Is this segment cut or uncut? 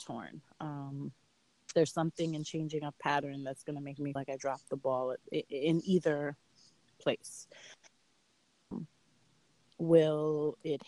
cut